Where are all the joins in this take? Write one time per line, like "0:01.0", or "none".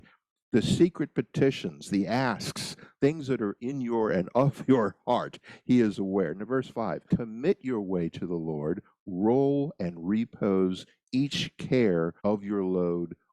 0:03.6
0:07.1
0:12.2

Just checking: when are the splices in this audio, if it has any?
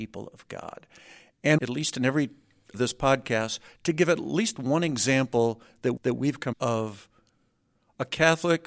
0:01.6
0:02.7
0:06.0
0:06.5

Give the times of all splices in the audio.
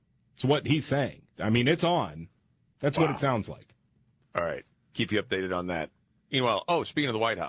0:01.3
0:03.9
0:04.8

